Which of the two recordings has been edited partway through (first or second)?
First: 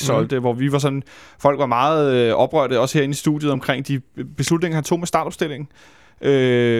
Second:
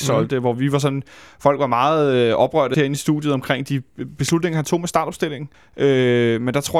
second